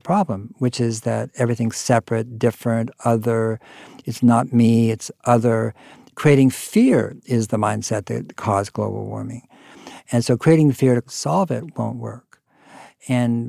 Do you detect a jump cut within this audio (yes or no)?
no